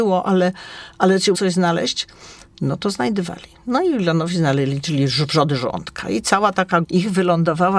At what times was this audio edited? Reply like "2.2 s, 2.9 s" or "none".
1.3 s, 6.8 s